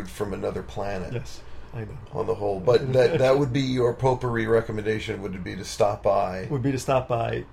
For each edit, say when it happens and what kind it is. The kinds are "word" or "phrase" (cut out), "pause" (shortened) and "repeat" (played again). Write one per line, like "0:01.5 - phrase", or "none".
none